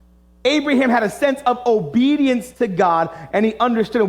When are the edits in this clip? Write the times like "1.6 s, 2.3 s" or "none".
none